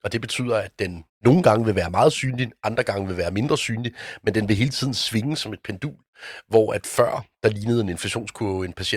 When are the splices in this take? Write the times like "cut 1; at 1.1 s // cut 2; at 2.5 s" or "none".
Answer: cut 1; at 1.1 s